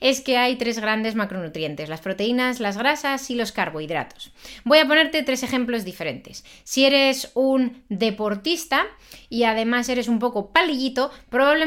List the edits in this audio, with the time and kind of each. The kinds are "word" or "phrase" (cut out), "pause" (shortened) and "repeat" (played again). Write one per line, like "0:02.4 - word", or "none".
none